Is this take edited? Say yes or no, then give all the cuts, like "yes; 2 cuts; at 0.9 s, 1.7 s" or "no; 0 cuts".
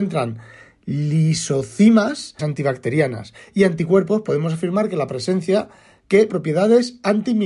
yes; 2 cuts; at 2.4 s, 6.3 s